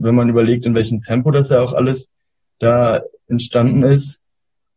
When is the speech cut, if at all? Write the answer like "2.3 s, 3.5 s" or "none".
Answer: none